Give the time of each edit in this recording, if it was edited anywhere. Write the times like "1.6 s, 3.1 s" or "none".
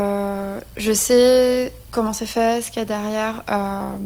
none